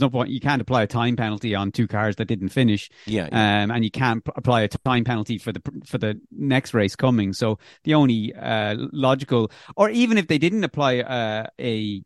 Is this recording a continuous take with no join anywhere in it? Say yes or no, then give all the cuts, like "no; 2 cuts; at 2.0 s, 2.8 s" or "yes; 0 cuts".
yes; 0 cuts